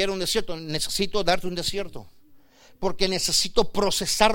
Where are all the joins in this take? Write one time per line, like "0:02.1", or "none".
none